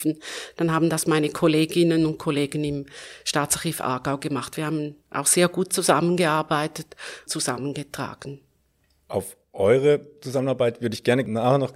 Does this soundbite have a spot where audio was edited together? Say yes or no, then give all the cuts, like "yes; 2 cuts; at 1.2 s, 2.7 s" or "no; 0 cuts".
yes; 1 cut; at 7.3 s